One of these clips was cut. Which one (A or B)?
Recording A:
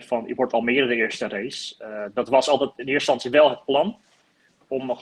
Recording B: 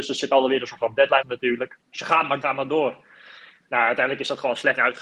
B